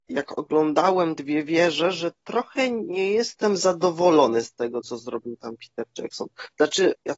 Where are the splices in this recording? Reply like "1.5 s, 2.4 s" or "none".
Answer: none